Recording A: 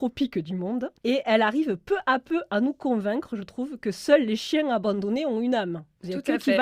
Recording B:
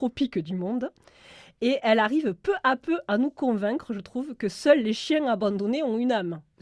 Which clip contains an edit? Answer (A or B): A